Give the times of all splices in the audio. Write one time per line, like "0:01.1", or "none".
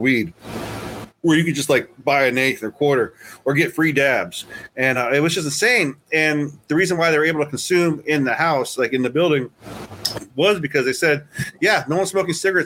none